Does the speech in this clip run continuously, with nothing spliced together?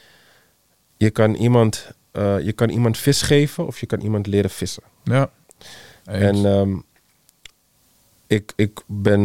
yes; 0 cuts

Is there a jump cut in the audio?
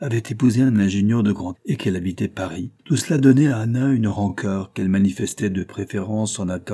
yes; 2 cuts; at 1.6 s, 2.8 s

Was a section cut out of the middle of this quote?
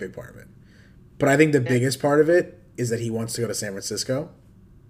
no; 0 cuts

